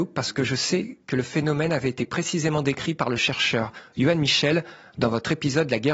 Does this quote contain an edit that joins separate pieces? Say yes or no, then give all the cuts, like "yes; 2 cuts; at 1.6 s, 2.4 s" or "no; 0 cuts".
no; 0 cuts